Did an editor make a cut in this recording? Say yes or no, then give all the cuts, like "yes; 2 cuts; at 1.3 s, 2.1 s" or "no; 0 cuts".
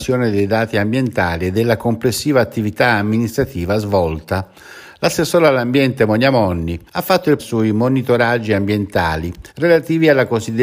yes; 3 cuts; at 6.9 s, 7.4 s, 9.5 s